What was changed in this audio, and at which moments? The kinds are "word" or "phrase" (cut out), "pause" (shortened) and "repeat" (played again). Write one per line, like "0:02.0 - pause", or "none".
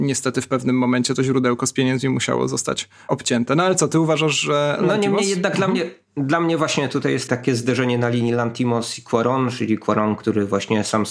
none